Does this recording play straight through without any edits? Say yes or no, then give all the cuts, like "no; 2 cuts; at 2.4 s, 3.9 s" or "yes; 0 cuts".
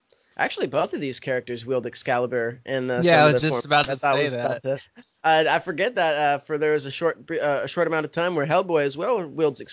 yes; 0 cuts